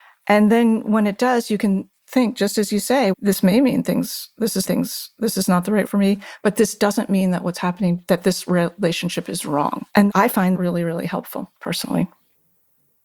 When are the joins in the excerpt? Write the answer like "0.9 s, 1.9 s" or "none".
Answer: 3.1 s, 4.6 s, 5.8 s, 9.9 s, 10.5 s, 11.6 s